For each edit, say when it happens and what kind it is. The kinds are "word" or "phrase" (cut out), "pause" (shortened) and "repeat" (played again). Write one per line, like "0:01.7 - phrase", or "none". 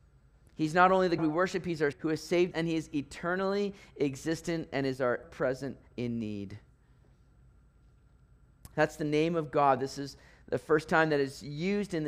0:01.2 - word
0:01.9 - word
0:02.5 - word
0:05.2 - word
0:05.9 - word